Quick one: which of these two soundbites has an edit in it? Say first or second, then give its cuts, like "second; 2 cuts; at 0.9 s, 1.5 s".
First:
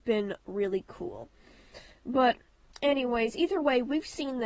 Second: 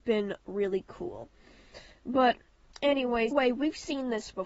second; 1 cut; at 3.3 s